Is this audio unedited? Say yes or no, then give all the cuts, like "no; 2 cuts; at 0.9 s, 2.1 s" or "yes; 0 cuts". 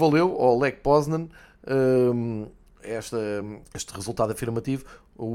no; 1 cut; at 3.6 s